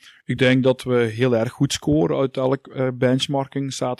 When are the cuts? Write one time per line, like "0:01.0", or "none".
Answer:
none